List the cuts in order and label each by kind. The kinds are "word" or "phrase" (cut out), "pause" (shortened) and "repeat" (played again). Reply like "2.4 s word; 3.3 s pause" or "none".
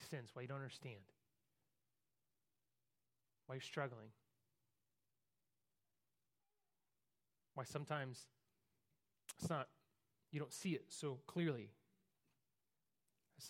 none